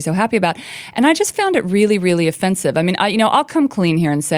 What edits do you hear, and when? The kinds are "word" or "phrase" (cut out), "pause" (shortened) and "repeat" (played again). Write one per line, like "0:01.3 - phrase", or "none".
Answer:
none